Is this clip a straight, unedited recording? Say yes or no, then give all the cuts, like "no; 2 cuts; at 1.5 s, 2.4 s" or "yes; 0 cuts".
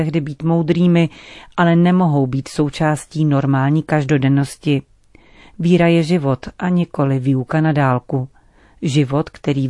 yes; 0 cuts